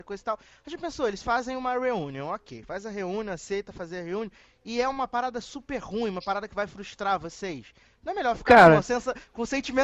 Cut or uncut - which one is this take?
uncut